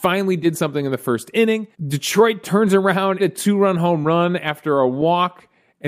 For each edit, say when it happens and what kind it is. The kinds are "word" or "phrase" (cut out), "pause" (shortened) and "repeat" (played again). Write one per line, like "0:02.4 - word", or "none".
0:01.7 - pause
0:03.2 - phrase